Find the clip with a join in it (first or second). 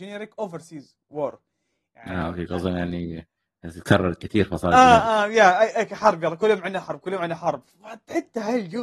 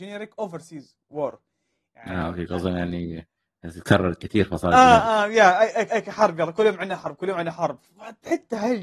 second